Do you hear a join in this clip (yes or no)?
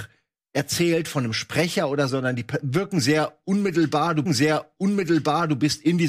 yes